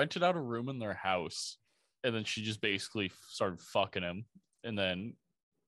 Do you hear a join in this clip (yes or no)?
no